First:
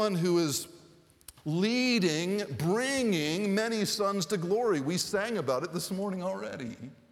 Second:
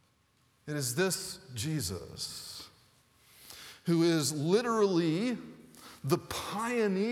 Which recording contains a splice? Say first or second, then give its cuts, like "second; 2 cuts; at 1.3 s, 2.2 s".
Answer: first; 1 cut; at 1.4 s